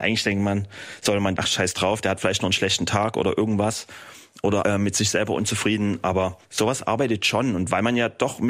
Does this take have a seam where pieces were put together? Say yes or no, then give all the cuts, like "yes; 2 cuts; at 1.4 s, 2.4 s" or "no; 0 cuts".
yes; 2 cuts; at 1.4 s, 4.6 s